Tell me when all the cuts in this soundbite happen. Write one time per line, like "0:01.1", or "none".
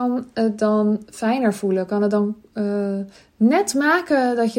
0:03.2

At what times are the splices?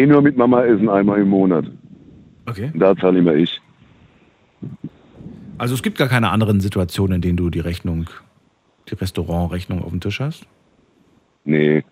none

